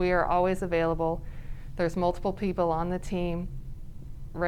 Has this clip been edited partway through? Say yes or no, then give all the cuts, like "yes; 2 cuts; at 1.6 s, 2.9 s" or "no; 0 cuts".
no; 0 cuts